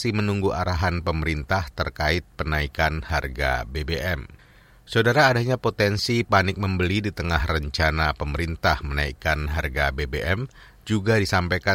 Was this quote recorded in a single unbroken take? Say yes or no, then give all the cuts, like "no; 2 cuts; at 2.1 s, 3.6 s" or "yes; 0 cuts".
yes; 0 cuts